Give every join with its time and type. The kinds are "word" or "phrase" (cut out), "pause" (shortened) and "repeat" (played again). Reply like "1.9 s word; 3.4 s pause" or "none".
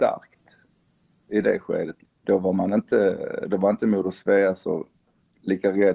none